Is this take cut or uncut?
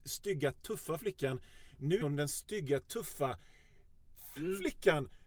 cut